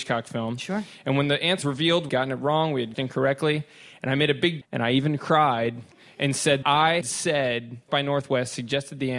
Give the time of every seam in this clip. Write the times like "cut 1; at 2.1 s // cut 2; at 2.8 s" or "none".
cut 1; at 1.6 s // cut 2; at 2.1 s // cut 3; at 2.9 s // cut 4; at 4.6 s // cut 5; at 6.6 s // cut 6; at 7.0 s // cut 7; at 7.9 s

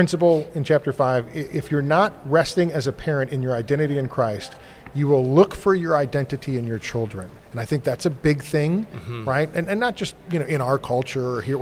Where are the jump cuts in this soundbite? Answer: cut 1; at 7.4 s

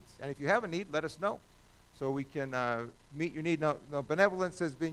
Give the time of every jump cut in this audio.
cut 1; at 3.0 s

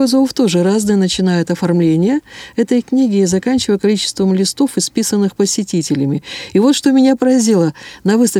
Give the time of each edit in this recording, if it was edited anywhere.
none

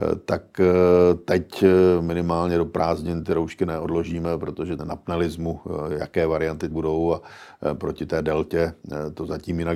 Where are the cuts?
cut 1; at 4.8 s // cut 2; at 6.7 s

